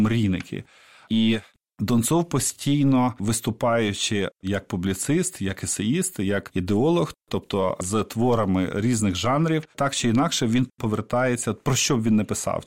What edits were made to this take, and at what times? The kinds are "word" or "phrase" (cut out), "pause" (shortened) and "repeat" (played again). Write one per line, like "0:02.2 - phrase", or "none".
0:09.7 - pause